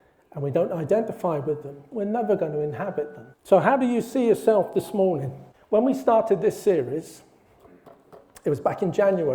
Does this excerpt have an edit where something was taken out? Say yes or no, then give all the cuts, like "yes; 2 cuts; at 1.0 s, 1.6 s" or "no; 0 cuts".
yes; 2 cuts; at 3.3 s, 5.5 s